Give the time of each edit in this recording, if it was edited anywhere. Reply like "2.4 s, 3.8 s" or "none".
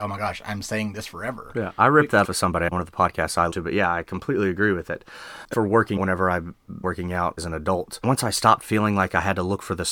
2.2 s, 2.7 s, 3.5 s, 5.5 s, 6.0 s, 6.8 s, 7.4 s